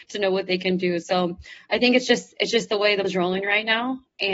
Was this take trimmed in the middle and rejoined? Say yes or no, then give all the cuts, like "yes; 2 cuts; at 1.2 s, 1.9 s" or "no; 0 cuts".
yes; 1 cut; at 3.0 s